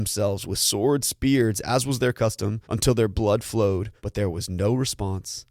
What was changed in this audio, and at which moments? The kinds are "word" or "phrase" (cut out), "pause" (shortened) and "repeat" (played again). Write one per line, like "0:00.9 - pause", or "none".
0:01.0 - word
0:02.6 - pause
0:04.0 - pause